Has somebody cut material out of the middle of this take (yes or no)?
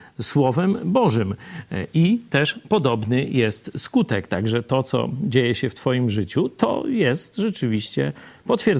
no